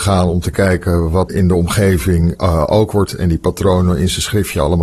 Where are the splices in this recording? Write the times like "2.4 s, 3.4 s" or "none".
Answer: 1.3 s, 3.1 s